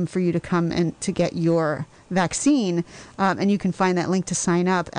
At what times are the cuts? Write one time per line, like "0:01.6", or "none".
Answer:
0:01.0